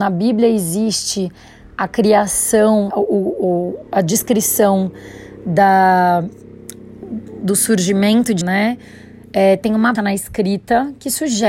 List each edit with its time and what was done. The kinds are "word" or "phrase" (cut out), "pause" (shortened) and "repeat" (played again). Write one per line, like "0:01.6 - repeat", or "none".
0:02.9 - word
0:07.4 - word
0:08.4 - word
0:10.0 - word

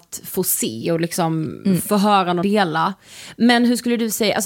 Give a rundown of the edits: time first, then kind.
0:02.4 - word

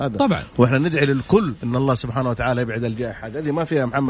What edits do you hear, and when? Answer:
none

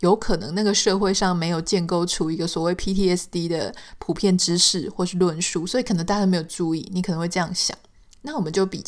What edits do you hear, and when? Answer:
none

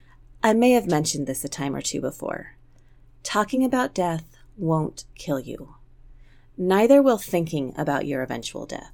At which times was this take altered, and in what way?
none

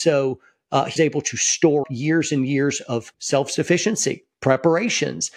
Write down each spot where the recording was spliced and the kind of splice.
0:01.0 - word
0:01.8 - word
0:03.1 - word

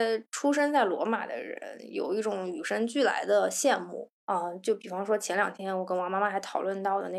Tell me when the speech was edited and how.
0:04.2 - pause

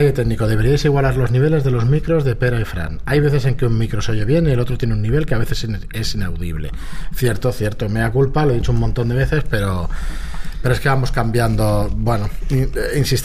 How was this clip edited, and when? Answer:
none

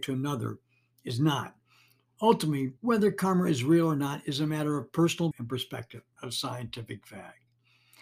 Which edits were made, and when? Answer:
0:02.8 - pause
0:05.3 - word
0:06.2 - word

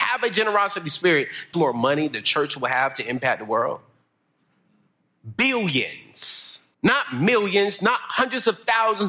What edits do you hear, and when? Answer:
0:01.5 - phrase
0:06.7 - pause

